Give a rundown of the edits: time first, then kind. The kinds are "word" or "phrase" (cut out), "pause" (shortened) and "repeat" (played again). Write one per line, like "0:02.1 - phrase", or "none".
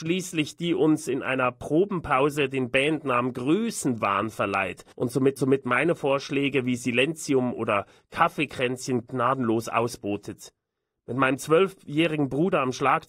0:04.9 - pause
0:05.4 - repeat